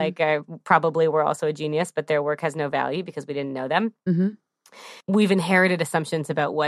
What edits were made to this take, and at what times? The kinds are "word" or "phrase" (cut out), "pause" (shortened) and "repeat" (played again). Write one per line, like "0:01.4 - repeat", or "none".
0:05.0 - pause